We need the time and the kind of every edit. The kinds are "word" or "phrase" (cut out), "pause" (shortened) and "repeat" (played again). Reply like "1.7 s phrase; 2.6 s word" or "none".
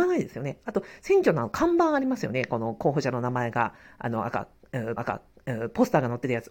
5.0 s repeat